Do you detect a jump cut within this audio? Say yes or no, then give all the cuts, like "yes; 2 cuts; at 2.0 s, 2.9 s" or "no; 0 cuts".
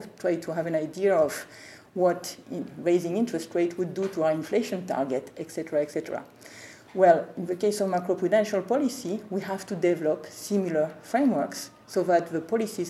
no; 0 cuts